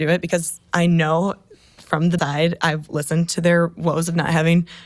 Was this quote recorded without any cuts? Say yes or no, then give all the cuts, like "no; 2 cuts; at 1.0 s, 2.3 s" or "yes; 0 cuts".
no; 1 cut; at 2.2 s